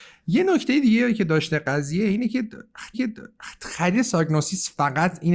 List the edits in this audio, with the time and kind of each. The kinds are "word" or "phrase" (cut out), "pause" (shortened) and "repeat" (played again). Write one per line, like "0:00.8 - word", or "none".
0:02.9 - repeat